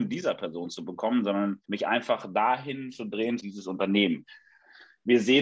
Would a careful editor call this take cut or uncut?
cut